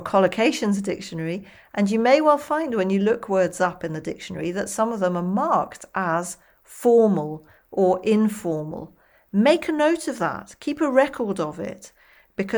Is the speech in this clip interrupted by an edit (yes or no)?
no